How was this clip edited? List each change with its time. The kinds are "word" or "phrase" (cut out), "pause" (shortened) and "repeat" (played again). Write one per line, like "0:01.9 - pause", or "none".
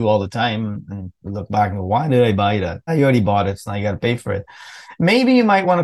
0:02.9 - word

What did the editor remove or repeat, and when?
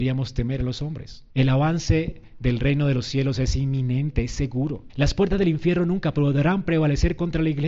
0:01.3 - pause
0:04.9 - pause

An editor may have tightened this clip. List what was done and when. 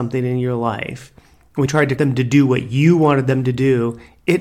0:01.7 - word
0:02.0 - phrase

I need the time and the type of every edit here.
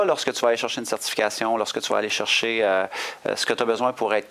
none

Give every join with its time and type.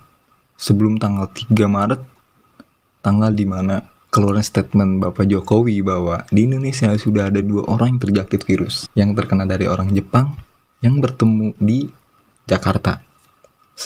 none

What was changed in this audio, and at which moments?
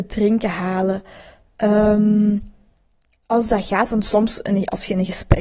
none

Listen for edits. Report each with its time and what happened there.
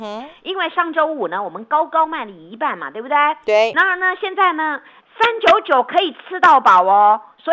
0:05.0 - word

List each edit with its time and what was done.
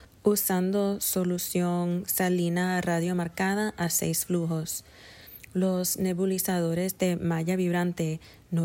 none

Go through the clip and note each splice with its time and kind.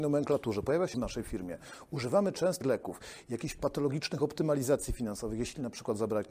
0:00.9 - word
0:02.6 - phrase

